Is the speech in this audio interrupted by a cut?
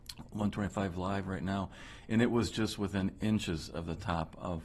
no; 0 cuts

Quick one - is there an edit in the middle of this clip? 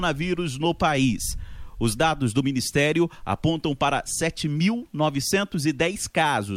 no; 0 cuts

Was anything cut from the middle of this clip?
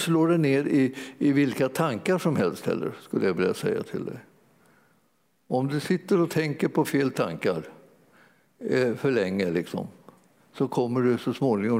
no; 0 cuts

